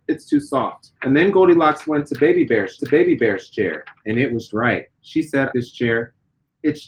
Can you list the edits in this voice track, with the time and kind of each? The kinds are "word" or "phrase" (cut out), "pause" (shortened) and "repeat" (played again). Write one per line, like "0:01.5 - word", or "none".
0:01.0 - pause
0:02.8 - repeat
0:04.5 - word
0:05.5 - phrase